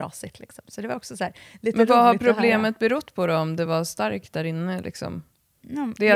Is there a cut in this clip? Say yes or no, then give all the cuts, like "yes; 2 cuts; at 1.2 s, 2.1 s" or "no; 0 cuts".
no; 0 cuts